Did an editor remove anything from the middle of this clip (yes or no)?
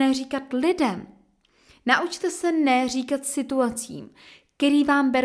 no